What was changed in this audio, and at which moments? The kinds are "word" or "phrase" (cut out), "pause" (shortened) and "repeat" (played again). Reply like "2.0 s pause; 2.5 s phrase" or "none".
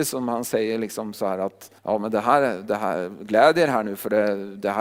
1.8 s pause